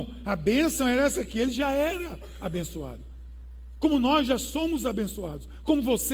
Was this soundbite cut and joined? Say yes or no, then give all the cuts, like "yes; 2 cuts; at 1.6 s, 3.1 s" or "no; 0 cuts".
no; 0 cuts